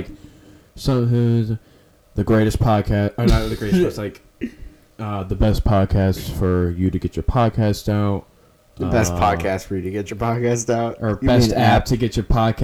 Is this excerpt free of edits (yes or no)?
yes